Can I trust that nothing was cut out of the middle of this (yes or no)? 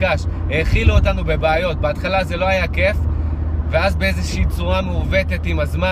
yes